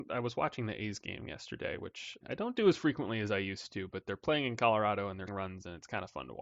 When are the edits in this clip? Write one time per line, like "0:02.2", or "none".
0:02.2
0:05.3